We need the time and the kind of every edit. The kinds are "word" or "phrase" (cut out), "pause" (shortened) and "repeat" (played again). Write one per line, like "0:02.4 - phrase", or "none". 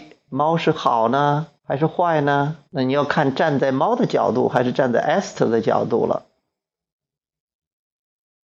0:01.6 - pause
0:02.7 - pause